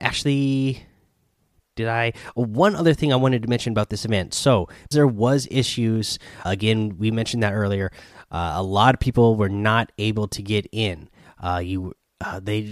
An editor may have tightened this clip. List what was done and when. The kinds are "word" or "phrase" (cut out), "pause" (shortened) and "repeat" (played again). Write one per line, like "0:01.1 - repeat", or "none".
0:04.9 - word
0:06.4 - word